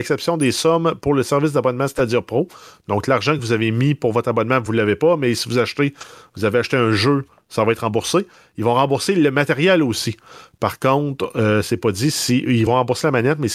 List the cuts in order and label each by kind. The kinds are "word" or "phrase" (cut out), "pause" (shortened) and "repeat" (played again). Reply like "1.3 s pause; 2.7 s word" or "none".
none